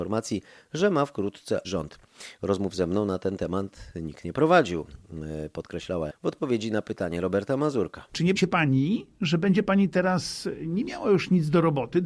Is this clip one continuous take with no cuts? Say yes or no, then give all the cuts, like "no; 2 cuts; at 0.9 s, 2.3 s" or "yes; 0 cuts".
no; 3 cuts; at 1.6 s, 6.1 s, 8.4 s